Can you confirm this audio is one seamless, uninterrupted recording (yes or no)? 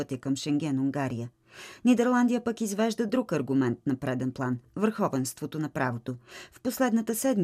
yes